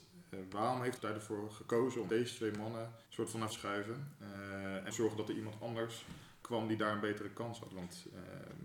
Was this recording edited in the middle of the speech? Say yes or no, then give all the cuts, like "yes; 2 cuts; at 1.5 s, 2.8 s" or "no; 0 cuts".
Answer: yes; 6 cuts; at 1.0 s, 2.1 s, 3.0 s, 3.5 s, 4.9 s, 6.4 s